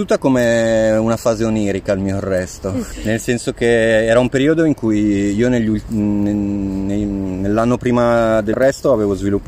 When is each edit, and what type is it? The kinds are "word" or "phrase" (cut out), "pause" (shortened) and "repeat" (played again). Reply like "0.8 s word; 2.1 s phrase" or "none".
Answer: 8.5 s word